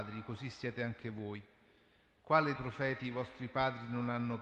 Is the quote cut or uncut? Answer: cut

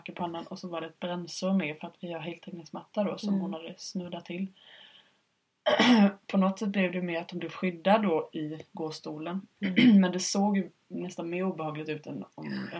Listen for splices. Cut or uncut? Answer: uncut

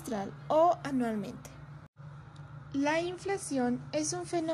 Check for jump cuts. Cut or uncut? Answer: uncut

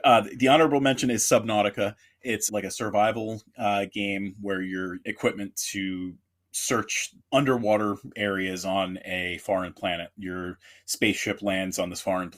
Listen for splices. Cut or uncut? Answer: cut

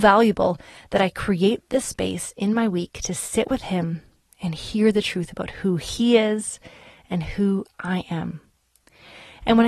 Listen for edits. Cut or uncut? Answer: uncut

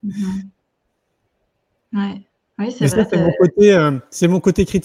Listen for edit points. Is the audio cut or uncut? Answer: uncut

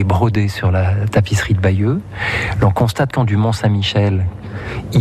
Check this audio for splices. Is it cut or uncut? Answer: cut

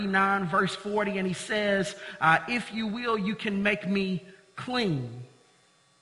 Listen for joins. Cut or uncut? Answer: uncut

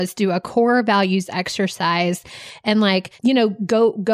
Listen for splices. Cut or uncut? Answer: cut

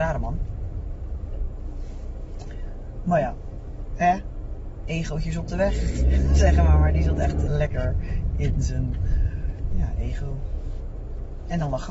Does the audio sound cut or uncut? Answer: cut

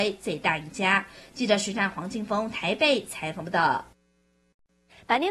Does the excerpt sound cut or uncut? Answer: uncut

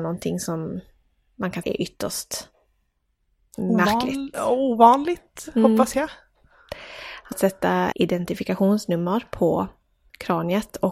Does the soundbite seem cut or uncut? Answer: cut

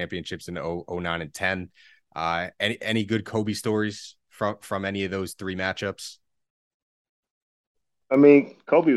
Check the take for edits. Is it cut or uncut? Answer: uncut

